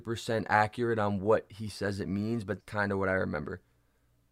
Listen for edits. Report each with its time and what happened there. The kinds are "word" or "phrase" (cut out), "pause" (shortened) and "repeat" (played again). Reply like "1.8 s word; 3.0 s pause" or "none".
2.6 s word